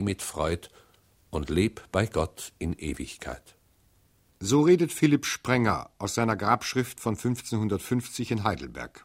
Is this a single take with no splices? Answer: yes; 0 cuts

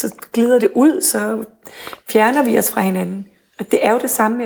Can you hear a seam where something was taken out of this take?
no; 0 cuts

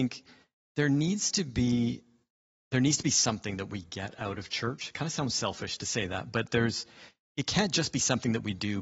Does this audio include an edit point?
no; 0 cuts

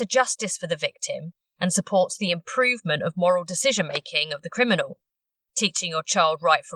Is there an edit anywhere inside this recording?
no; 0 cuts

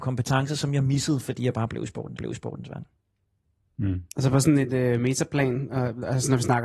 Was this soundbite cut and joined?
yes; 2 cuts; at 2.2 s, 4.1 s

